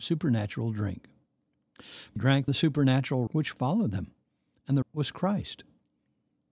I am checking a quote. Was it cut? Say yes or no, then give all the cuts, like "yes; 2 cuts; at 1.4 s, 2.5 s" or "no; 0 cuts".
yes; 4 cuts; at 2.2 s, 2.5 s, 3.3 s, 4.8 s